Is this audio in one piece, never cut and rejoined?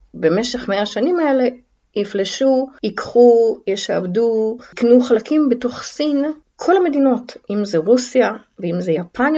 yes; 0 cuts

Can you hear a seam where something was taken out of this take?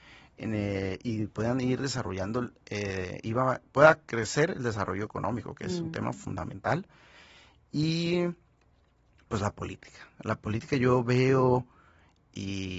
no; 0 cuts

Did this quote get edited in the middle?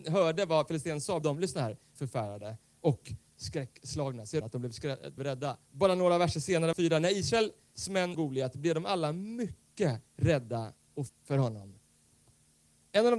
yes; 9 cuts; at 1.2 s, 2.0 s, 4.4 s, 5.2 s, 5.6 s, 6.7 s, 8.1 s, 10.1 s, 11.1 s

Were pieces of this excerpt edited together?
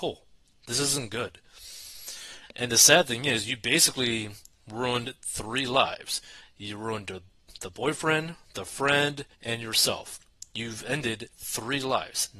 yes; 1 cut; at 9.3 s

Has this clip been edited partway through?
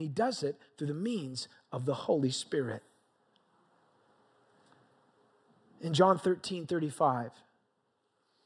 no; 0 cuts

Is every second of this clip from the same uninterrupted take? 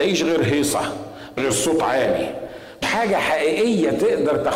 no; 2 cuts; at 1.4 s, 2.8 s

